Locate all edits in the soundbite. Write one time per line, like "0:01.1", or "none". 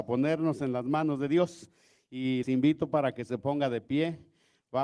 0:02.4